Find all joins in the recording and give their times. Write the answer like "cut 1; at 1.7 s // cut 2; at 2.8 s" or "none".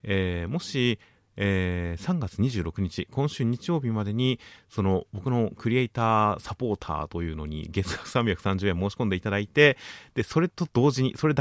none